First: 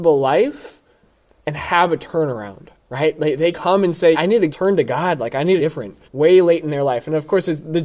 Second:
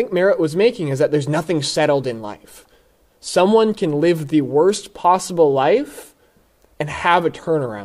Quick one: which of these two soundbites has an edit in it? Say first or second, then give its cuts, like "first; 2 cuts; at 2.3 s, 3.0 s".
first; 5 cuts; at 3.5 s, 4.1 s, 4.5 s, 5.6 s, 6.0 s